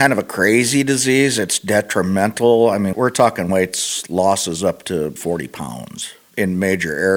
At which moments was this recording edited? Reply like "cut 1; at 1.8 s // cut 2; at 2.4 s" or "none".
cut 1; at 2.9 s // cut 2; at 3.5 s // cut 3; at 5.2 s

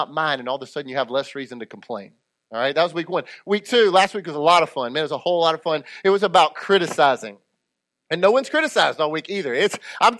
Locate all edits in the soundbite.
none

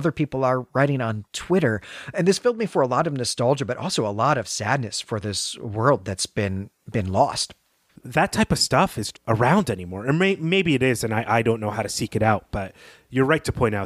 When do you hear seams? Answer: cut 1; at 9.1 s

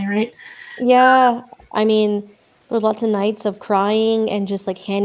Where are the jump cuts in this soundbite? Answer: none

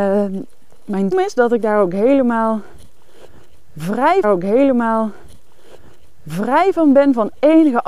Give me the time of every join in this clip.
cut 1; at 1.1 s // cut 2; at 4.2 s

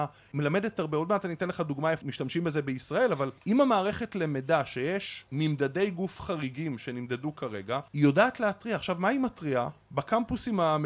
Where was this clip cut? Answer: cut 1; at 2.0 s // cut 2; at 3.4 s

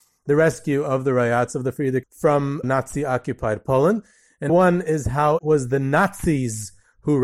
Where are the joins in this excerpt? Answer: cut 1; at 2.0 s // cut 2; at 2.6 s // cut 3; at 4.5 s // cut 4; at 5.4 s

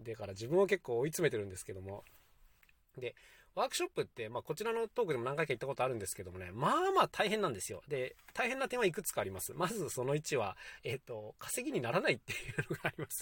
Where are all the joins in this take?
none

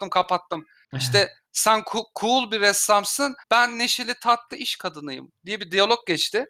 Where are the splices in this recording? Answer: cut 1; at 3.4 s

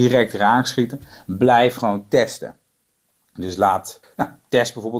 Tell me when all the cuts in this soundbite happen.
cut 1; at 4.0 s

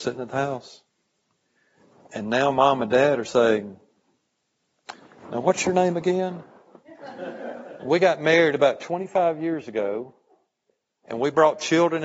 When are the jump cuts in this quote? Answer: none

